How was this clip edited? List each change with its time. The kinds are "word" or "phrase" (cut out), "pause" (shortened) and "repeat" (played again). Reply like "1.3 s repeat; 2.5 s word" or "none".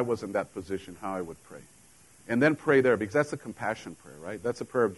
none